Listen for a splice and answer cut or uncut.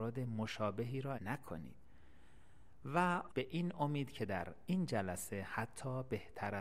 cut